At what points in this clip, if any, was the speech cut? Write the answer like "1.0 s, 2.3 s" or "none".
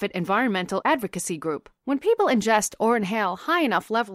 1.8 s